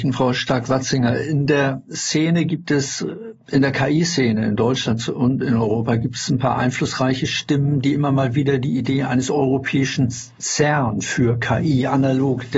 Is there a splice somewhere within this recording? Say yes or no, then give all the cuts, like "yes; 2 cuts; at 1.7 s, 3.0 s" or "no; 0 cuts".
no; 0 cuts